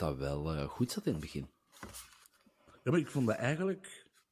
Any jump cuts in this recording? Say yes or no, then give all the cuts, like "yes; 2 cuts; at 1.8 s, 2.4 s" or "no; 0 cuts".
no; 0 cuts